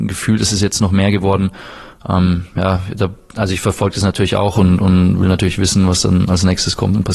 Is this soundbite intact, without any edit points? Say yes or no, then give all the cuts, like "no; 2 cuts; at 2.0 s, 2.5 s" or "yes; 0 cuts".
yes; 0 cuts